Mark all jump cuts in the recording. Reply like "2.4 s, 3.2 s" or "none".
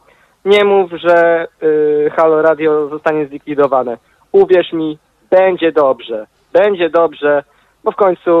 none